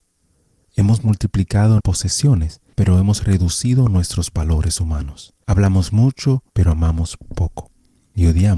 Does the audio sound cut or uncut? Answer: cut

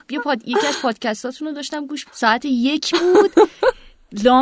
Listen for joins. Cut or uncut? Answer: cut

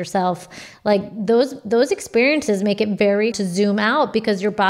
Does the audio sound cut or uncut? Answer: cut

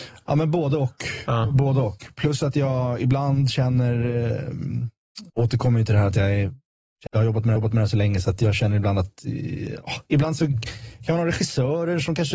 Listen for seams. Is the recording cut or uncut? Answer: cut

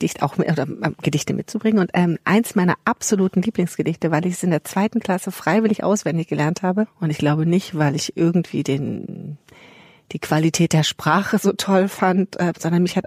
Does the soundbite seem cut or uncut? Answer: uncut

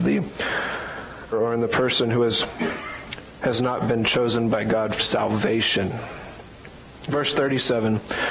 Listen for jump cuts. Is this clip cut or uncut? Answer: cut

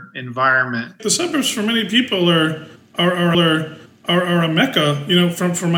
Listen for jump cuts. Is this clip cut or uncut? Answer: cut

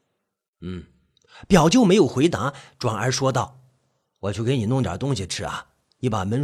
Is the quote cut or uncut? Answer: uncut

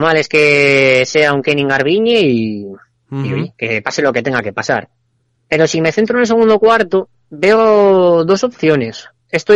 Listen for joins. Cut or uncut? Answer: uncut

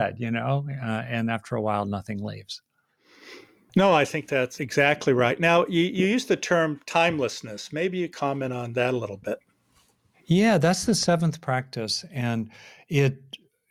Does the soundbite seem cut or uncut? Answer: cut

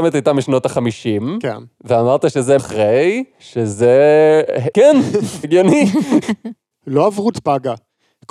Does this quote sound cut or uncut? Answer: cut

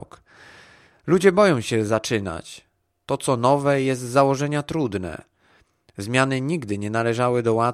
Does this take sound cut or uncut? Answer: uncut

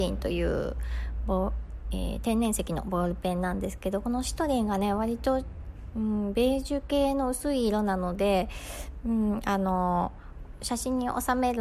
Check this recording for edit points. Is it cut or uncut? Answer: uncut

